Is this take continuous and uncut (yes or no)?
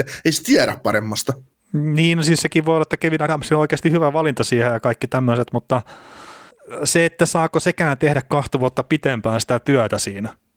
yes